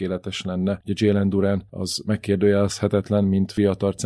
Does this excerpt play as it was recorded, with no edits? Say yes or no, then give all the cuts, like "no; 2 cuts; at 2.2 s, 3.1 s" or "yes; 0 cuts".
yes; 0 cuts